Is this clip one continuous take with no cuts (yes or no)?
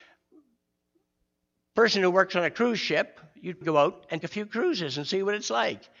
no